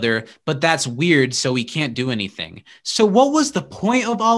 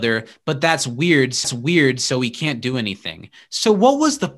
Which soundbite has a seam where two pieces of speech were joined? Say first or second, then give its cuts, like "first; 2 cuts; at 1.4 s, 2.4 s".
second; 1 cut; at 1.4 s